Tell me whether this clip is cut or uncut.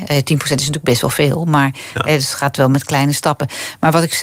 uncut